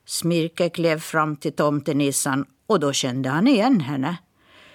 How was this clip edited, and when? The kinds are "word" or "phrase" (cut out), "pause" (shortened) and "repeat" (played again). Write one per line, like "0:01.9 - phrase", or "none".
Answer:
none